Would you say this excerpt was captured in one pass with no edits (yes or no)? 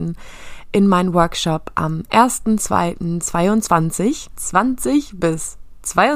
no